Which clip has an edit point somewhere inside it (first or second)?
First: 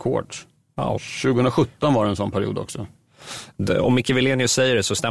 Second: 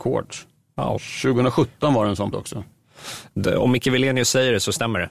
second